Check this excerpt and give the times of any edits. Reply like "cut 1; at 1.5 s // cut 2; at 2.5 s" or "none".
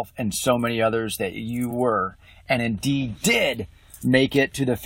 none

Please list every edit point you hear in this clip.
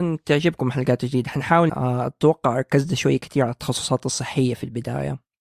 cut 1; at 1.7 s

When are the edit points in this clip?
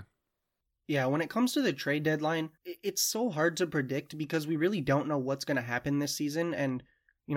cut 1; at 2.6 s

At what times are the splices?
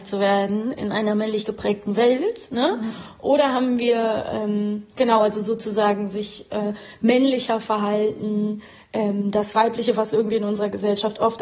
none

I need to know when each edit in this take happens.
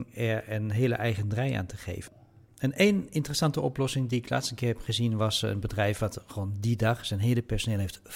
none

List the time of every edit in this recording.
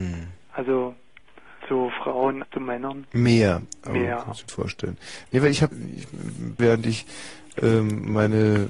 cut 1; at 1.6 s // cut 2; at 2.4 s // cut 3; at 4.5 s // cut 4; at 5.7 s // cut 5; at 6.6 s

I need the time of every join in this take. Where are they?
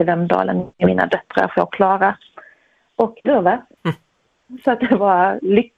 cut 1; at 1.5 s // cut 2; at 3.2 s // cut 3; at 3.8 s

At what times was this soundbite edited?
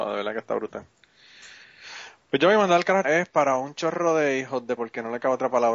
cut 1; at 3.0 s // cut 2; at 4.8 s

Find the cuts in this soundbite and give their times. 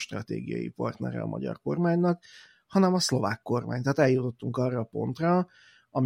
none

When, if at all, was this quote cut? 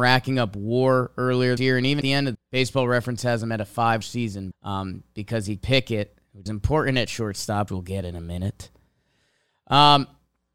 cut 1; at 1.6 s // cut 2; at 2.0 s // cut 3; at 2.3 s // cut 4; at 4.0 s // cut 5; at 4.5 s // cut 6; at 5.6 s // cut 7; at 6.5 s // cut 8; at 7.7 s // cut 9; at 8.0 s

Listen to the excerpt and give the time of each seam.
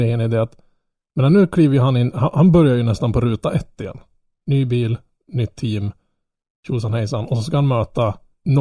none

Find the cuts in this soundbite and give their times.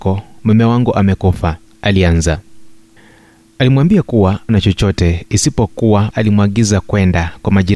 cut 1; at 1.7 s // cut 2; at 4.5 s // cut 3; at 6.1 s

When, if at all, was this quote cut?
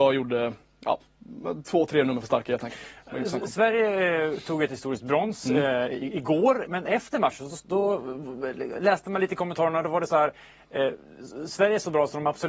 cut 1; at 6.7 s

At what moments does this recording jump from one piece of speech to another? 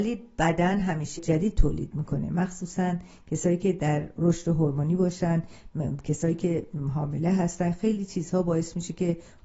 cut 1; at 1.2 s

